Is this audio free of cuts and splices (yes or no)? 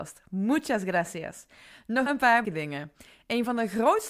no